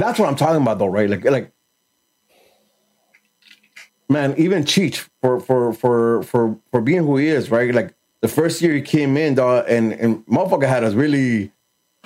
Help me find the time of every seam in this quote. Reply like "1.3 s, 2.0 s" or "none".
3.9 s, 5.1 s, 8.1 s